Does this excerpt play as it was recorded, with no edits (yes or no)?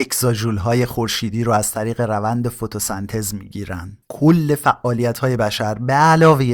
no